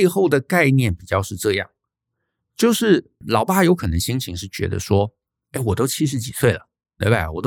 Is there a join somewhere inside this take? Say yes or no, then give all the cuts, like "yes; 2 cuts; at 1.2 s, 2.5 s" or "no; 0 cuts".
no; 0 cuts